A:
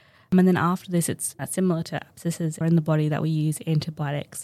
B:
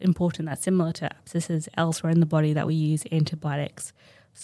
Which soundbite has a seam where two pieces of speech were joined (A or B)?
A